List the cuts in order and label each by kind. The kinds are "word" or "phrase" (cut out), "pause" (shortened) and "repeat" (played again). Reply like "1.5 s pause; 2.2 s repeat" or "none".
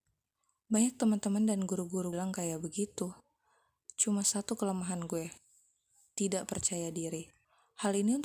2.1 s word